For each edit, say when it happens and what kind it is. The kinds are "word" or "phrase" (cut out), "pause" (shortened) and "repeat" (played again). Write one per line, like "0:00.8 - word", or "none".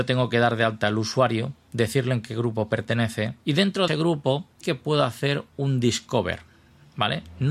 0:03.4 - pause
0:03.9 - phrase
0:04.6 - word